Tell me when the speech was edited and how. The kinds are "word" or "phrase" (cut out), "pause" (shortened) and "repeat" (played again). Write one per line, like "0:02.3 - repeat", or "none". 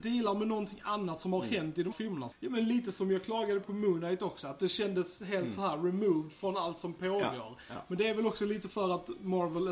0:01.9 - word
0:02.3 - phrase
0:03.6 - word